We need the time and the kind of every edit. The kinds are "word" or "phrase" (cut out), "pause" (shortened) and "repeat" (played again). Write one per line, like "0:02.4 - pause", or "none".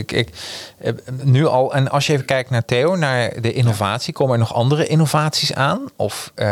none